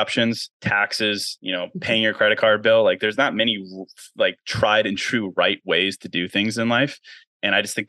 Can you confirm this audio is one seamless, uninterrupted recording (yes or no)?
yes